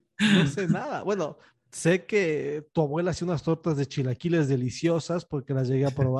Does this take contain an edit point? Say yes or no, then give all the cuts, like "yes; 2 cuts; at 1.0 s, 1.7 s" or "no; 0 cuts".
no; 0 cuts